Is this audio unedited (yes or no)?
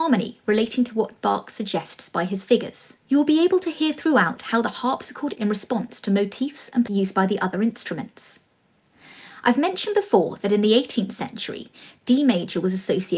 no